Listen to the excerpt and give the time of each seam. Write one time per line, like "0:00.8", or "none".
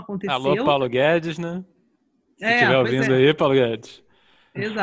none

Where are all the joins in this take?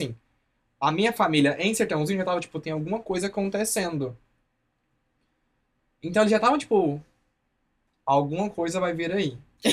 none

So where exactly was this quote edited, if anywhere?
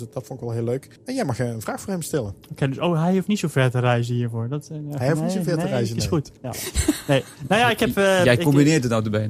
0:01.0
0:06.4

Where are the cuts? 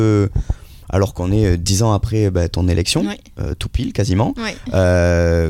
none

